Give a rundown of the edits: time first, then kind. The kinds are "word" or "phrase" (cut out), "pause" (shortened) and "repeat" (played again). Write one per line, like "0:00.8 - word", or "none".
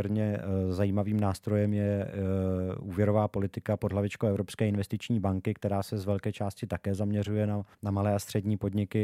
0:07.7 - pause